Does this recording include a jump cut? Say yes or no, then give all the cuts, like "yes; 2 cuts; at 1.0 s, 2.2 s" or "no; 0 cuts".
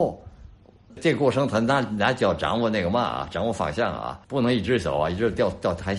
yes; 1 cut; at 4.2 s